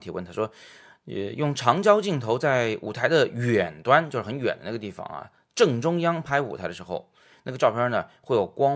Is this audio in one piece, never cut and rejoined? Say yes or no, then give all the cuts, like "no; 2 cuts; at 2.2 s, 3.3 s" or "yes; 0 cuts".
yes; 0 cuts